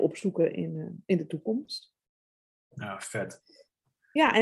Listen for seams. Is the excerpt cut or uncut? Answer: uncut